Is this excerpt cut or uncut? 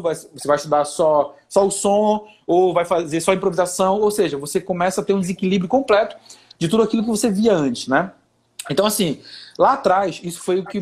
uncut